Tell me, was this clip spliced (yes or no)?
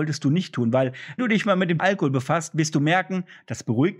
yes